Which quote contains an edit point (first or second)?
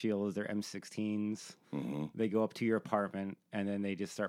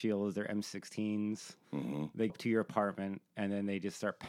second